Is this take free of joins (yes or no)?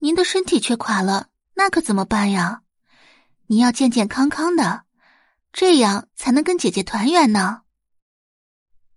yes